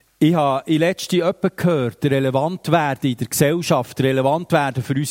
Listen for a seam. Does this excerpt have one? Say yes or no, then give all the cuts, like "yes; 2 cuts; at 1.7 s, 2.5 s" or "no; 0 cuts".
no; 0 cuts